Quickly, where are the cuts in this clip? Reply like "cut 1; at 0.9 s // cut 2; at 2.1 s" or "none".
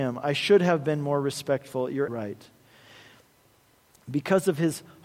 cut 1; at 2.1 s

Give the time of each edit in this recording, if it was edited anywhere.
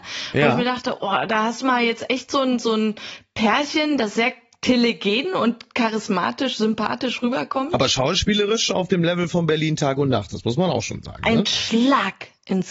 none

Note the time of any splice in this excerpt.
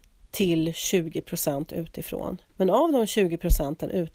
cut 1; at 2.5 s

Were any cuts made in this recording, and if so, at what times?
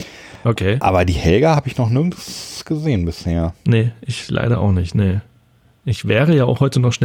none

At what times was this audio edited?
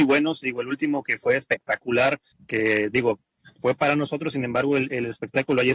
cut 1; at 2.3 s

